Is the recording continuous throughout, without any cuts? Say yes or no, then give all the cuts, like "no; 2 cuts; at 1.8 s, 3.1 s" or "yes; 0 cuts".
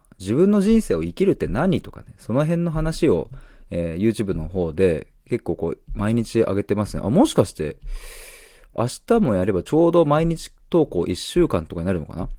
yes; 0 cuts